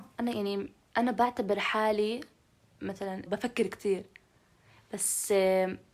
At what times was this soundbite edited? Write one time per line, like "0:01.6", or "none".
0:03.3